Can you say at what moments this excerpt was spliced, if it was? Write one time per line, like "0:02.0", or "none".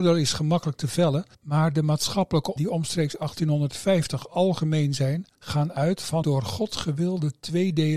0:01.3
0:02.6
0:05.3
0:06.2